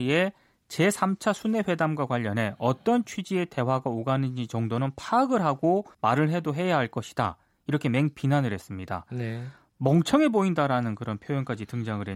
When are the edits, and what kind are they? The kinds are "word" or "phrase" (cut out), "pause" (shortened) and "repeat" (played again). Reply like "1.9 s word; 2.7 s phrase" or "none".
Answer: 5.9 s pause